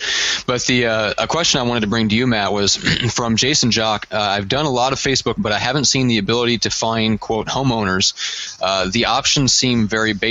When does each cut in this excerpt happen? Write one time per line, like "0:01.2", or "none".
0:05.4